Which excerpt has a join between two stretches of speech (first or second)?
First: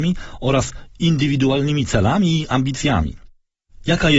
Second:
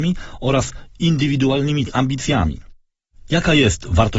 second